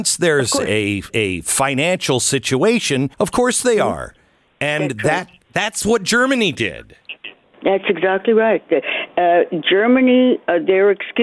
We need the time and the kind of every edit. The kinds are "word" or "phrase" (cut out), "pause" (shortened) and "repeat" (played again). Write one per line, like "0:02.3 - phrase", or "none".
0:01.1 - word
0:03.1 - pause